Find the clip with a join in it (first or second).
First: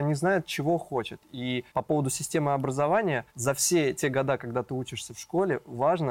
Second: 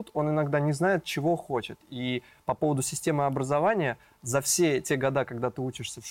first